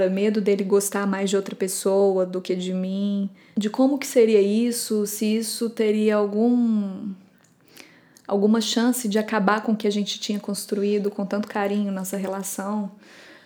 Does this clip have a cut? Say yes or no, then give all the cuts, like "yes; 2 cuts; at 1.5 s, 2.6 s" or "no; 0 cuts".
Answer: no; 0 cuts